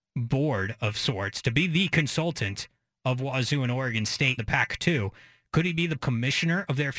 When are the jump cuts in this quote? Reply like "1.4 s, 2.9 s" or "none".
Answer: 4.4 s, 6.0 s